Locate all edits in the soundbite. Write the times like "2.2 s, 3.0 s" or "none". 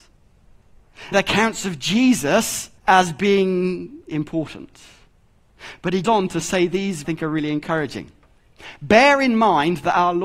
1.1 s, 2.8 s, 6.0 s, 7.0 s